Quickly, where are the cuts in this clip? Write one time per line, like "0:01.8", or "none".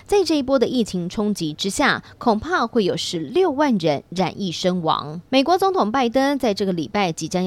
0:05.3